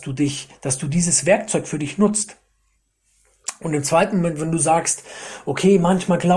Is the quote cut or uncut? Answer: uncut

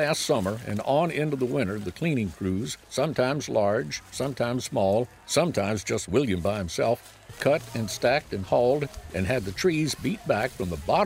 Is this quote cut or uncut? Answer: cut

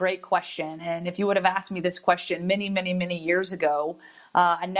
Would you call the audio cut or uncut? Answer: uncut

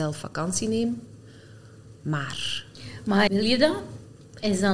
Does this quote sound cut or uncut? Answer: cut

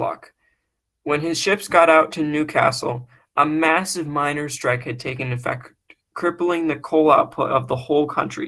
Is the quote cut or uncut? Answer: uncut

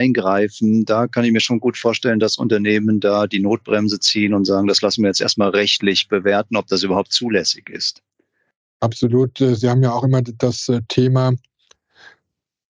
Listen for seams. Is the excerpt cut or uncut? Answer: uncut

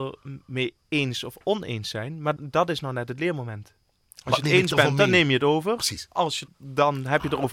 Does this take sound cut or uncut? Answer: cut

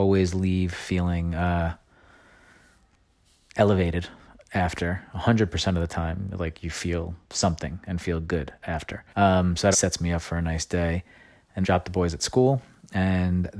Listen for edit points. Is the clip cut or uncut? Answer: cut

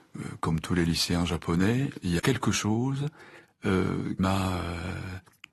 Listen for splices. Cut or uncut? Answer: cut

